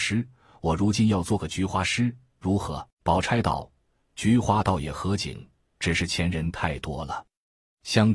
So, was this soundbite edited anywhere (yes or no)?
yes